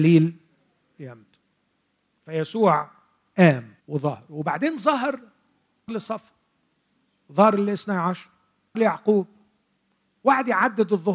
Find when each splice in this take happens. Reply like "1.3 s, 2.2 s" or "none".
3.8 s, 5.9 s, 8.7 s